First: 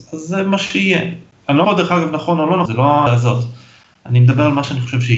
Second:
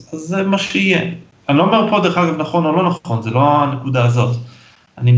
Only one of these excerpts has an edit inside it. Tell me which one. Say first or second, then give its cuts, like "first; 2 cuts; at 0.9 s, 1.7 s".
first; 3 cuts; at 1.6 s, 2.7 s, 3.1 s